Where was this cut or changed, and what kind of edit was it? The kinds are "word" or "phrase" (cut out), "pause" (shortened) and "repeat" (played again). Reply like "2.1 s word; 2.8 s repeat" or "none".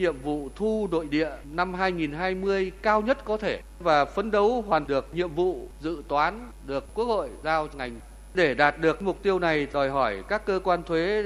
4.9 s word; 7.7 s word